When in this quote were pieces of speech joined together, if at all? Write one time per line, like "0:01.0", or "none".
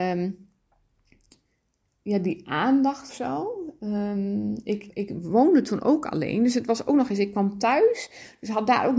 0:03.1
0:04.9